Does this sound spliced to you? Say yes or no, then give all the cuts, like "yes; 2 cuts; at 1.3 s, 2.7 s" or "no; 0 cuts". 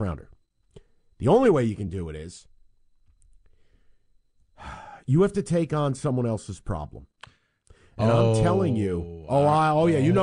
no; 0 cuts